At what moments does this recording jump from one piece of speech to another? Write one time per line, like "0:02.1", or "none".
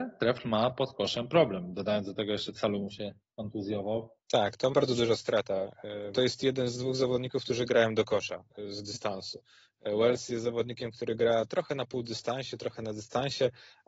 0:02.5
0:04.2
0:04.7
0:06.1

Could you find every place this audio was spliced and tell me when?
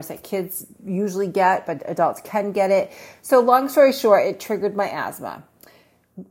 none

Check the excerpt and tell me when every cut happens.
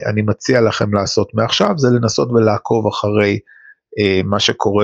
none

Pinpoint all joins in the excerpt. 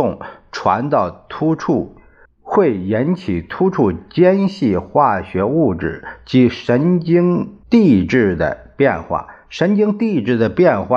0:02.3
0:07.6

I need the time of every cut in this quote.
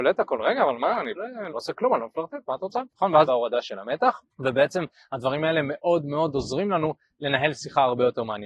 0:01.2
0:01.5
0:02.9
0:03.3
0:04.3

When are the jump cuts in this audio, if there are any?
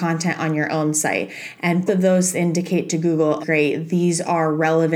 0:01.9
0:02.3
0:03.4

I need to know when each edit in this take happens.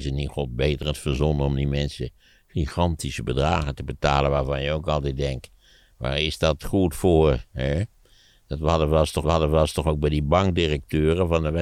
0:09.2

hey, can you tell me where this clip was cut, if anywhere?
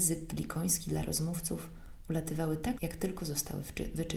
0:02.8

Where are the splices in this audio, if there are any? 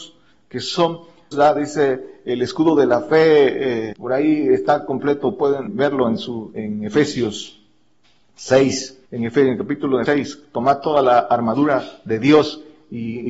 0:01.3
0:03.9
0:05.7
0:06.5
0:09.0
0:10.1

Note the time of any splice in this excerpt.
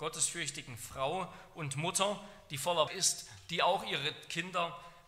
0:02.9

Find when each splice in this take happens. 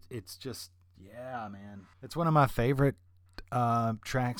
0:01.9

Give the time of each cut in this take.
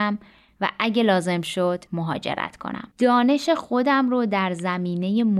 0:01.9
0:02.9

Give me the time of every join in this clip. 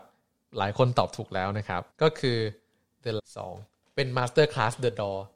0:01.9
0:03.2

